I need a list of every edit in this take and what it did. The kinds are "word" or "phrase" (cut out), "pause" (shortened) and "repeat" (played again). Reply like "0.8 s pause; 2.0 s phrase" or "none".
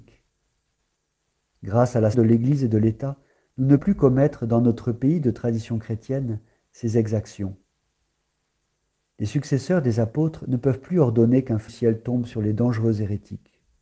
2.1 s word; 3.8 s word; 11.7 s word